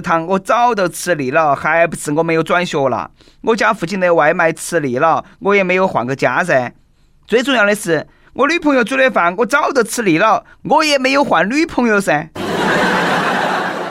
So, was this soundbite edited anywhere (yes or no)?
no